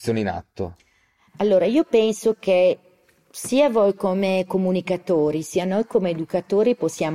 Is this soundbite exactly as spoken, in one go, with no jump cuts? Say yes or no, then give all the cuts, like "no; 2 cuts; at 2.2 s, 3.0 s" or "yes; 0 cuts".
yes; 0 cuts